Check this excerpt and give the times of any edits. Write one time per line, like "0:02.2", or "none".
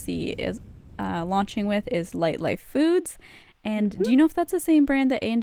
none